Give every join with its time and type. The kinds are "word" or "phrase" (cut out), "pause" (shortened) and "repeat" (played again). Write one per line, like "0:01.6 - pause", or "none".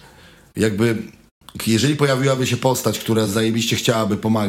none